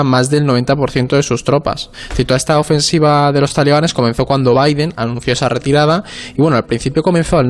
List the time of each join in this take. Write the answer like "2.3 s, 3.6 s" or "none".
none